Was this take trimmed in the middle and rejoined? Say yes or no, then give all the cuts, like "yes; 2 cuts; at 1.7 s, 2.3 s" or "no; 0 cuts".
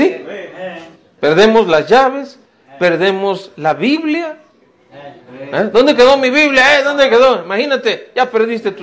no; 0 cuts